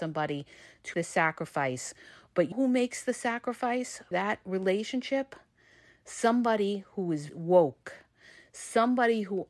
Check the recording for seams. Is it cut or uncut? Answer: cut